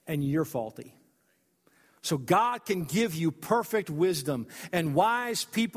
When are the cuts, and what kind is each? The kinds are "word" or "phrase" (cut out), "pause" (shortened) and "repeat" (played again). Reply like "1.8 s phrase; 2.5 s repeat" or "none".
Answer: none